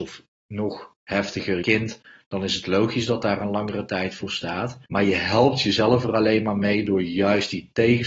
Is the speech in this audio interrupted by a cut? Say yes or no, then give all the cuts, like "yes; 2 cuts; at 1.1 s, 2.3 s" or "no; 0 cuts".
yes; 2 cuts; at 1.6 s, 4.8 s